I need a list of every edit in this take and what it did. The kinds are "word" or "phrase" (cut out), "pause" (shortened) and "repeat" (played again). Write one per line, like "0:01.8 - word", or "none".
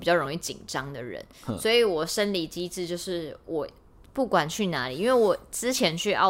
none